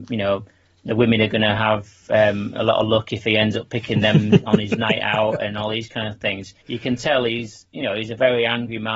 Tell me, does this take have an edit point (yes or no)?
yes